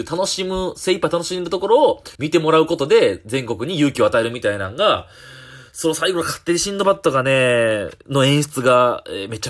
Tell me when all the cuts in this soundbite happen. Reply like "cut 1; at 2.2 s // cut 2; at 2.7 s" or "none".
cut 1; at 2.2 s